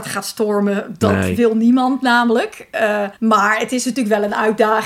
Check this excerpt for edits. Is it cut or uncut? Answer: cut